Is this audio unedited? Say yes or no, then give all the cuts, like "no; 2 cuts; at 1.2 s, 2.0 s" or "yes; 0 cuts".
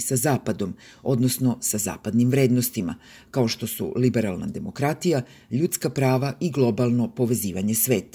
yes; 0 cuts